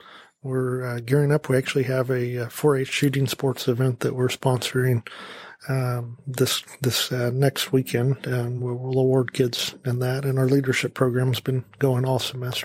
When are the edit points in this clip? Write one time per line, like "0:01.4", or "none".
none